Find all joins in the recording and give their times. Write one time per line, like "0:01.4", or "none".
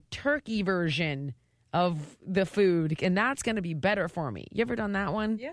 none